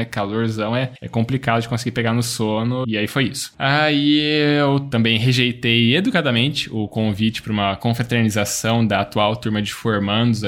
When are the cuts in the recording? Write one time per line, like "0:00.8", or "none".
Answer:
0:02.8